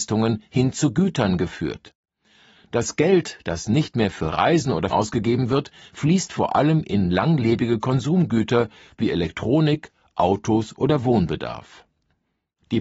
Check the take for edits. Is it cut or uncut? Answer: cut